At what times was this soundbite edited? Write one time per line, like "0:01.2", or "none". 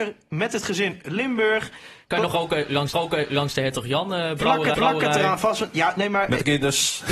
0:01.0
0:02.9
0:04.7